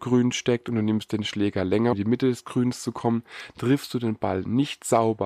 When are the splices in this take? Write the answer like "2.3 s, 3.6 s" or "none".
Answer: 1.9 s